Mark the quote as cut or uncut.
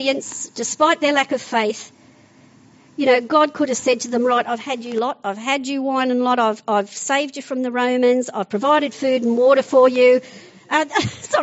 uncut